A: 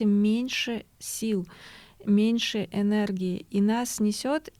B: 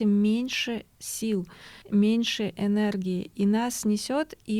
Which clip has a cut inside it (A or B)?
B